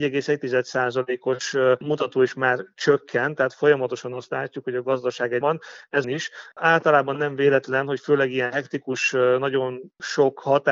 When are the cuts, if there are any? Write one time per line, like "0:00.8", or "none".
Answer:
0:05.4
0:06.0